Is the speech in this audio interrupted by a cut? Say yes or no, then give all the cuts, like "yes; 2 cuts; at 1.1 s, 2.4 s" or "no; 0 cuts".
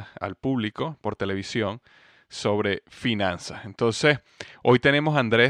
no; 0 cuts